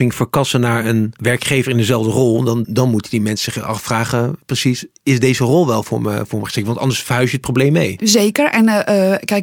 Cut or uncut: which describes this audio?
cut